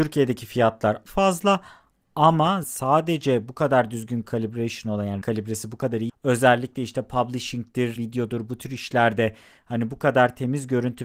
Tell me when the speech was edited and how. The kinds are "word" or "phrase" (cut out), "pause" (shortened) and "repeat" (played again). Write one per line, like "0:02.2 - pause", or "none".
0:01.0 - word
0:02.6 - word
0:04.2 - word
0:05.2 - word
0:06.1 - word
0:08.0 - word